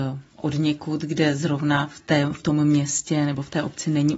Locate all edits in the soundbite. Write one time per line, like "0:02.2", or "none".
none